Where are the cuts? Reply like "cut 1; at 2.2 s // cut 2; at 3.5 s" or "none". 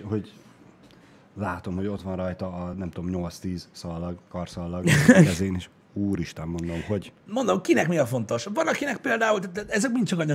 none